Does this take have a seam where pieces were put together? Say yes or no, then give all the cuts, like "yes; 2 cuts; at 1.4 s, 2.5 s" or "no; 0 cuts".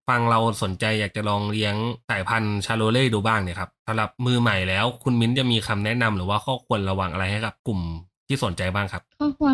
yes; 2 cuts; at 2.0 s, 4.1 s